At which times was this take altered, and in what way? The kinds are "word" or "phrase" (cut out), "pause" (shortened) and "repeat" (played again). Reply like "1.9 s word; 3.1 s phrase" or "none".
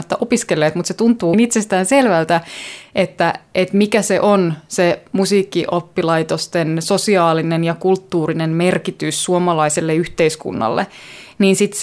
1.3 s phrase